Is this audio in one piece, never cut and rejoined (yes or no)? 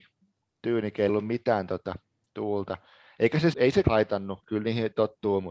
no